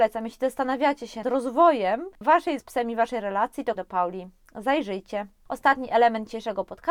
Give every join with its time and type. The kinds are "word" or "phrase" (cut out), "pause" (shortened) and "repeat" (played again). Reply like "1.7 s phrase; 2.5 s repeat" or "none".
1.2 s word; 2.6 s word; 3.8 s word

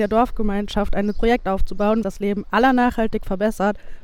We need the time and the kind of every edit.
1.1 s word; 2.0 s word

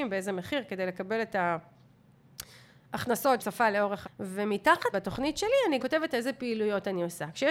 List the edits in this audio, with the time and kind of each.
3.4 s word; 4.0 s word; 4.9 s word; 5.8 s word

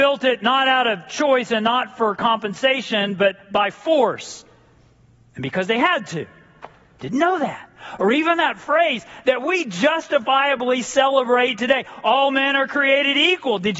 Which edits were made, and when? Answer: none

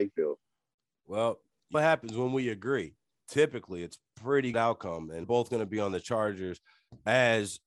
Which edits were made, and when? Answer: 1.7 s word; 4.5 s word; 5.2 s word

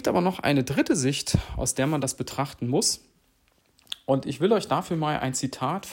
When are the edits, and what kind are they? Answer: none

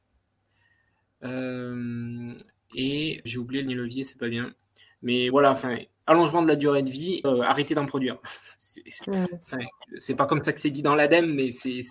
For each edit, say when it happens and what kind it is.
3.3 s word; 3.7 s word; 5.3 s word; 7.2 s word

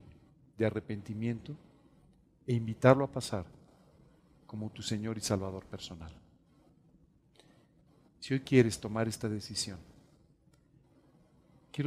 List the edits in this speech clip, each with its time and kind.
none

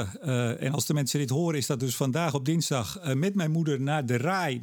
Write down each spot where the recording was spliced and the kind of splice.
none

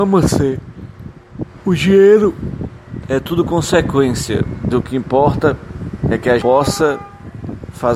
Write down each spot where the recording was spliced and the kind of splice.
4.7 s word; 6.4 s word

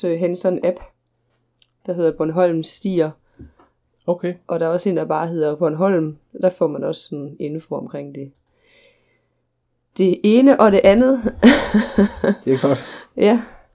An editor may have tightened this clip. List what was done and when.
none

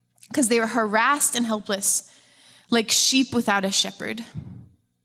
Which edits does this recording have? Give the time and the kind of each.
none

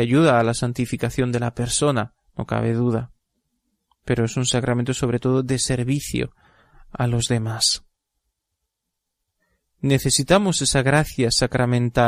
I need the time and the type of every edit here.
none

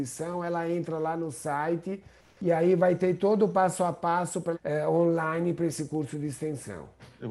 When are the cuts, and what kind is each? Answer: 4.5 s phrase

